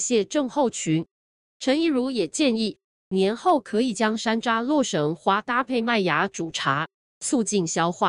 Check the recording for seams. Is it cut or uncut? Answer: uncut